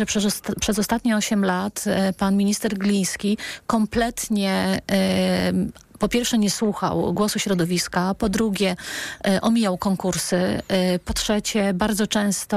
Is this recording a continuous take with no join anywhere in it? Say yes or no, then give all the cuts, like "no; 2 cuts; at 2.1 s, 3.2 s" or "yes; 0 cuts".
yes; 0 cuts